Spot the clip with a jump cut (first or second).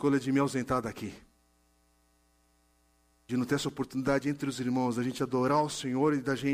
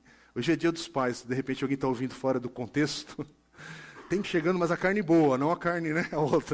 second